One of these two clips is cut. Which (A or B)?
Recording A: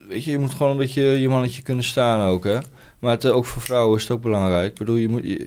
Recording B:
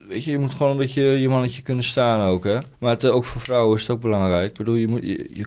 B